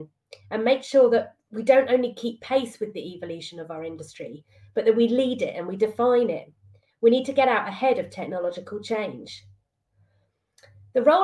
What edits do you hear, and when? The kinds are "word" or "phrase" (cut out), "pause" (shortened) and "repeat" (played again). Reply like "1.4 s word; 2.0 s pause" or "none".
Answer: none